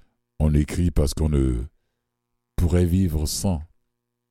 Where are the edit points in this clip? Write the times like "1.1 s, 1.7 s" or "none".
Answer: none